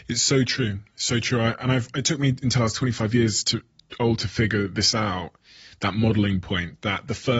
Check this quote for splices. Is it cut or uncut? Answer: uncut